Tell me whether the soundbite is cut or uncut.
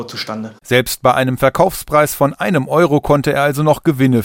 uncut